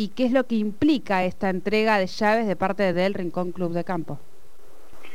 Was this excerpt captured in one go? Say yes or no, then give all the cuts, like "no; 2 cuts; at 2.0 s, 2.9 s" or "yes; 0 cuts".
yes; 0 cuts